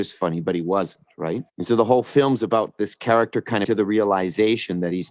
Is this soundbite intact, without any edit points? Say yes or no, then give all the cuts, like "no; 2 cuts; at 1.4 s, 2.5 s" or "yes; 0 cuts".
no; 2 cuts; at 1.5 s, 3.6 s